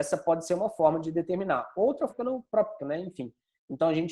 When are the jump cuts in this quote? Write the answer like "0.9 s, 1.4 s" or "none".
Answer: 2.1 s, 2.8 s